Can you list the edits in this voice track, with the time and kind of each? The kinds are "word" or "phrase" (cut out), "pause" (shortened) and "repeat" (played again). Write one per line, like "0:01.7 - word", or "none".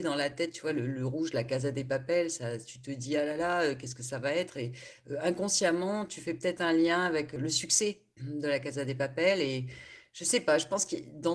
0:08.1 - pause